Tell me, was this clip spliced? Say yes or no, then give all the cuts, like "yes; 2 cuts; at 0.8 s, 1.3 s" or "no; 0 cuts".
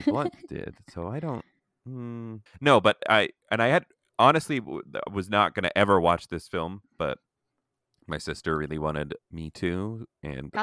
yes; 2 cuts; at 2.5 s, 9.2 s